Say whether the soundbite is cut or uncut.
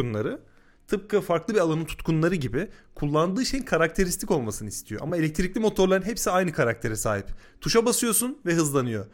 uncut